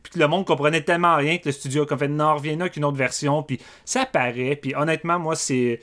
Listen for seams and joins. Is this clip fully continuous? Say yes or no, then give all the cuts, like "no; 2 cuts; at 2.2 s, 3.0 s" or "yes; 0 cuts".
yes; 0 cuts